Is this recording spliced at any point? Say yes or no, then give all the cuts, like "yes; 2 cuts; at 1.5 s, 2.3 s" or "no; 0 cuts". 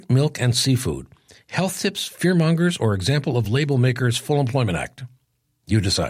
no; 0 cuts